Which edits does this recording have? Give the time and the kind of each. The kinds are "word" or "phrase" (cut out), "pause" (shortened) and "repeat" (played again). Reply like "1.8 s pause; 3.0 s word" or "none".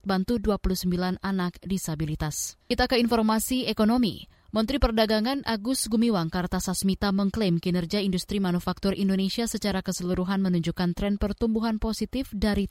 2.6 s pause